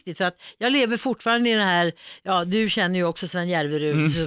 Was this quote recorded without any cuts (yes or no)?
yes